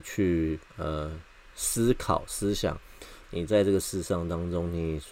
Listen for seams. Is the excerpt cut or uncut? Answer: uncut